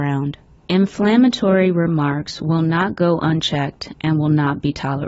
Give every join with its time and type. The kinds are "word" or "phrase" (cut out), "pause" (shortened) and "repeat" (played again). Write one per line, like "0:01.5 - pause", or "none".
none

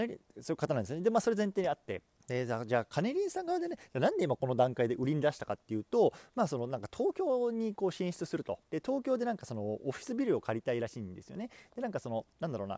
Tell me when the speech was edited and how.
0:02.1 - pause
0:08.6 - pause

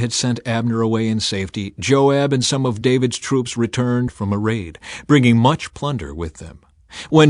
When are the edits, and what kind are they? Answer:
none

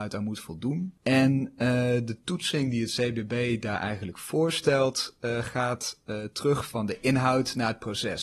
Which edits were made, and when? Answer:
0:01.0 - pause

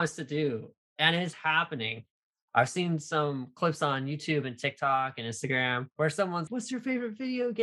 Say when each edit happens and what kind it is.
0:01.3 - word
0:05.9 - pause
0:06.5 - word

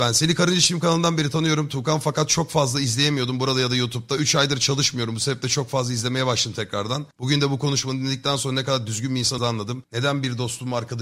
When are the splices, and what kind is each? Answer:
0:09.4 - phrase

